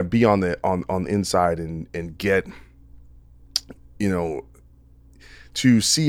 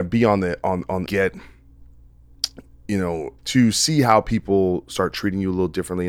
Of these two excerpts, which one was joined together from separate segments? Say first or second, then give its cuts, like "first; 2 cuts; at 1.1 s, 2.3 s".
second; 2 cuts; at 1.1 s, 3.4 s